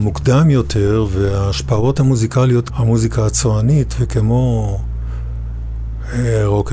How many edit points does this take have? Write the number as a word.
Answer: one